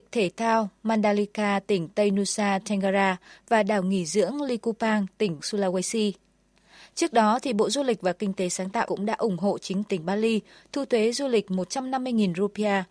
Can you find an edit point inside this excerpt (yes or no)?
yes